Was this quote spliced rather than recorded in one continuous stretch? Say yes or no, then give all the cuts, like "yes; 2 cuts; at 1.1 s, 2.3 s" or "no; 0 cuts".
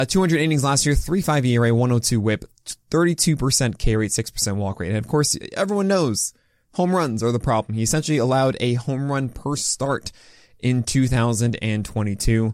no; 0 cuts